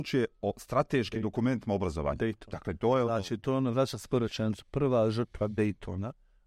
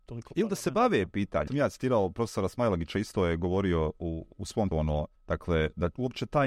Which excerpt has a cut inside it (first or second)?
second